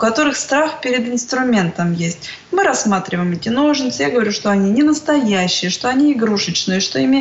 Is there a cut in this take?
no; 0 cuts

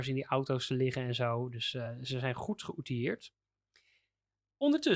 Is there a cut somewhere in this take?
no; 0 cuts

